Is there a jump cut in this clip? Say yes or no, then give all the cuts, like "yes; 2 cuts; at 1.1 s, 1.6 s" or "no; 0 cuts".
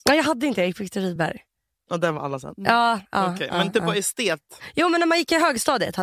no; 0 cuts